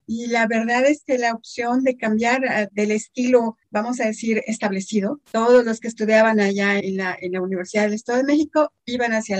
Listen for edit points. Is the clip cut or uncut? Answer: cut